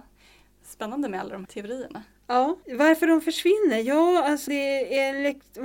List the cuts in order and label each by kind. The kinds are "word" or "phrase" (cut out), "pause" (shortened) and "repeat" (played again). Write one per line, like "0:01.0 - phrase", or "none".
0:01.4 - word
0:02.6 - pause
0:04.5 - word